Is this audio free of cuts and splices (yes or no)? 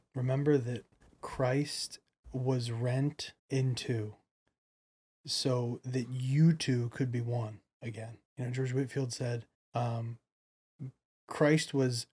no